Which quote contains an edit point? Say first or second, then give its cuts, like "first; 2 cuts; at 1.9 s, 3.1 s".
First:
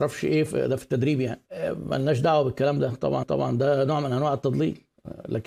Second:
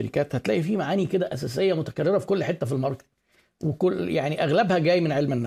first; 2 cuts; at 1.5 s, 3.2 s